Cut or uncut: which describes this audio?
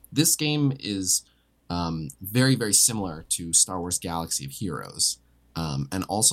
uncut